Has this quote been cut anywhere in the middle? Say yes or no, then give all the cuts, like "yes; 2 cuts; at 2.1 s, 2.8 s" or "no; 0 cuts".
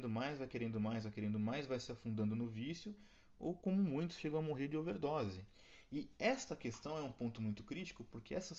no; 0 cuts